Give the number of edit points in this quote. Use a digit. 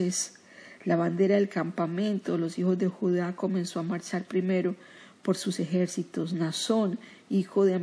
0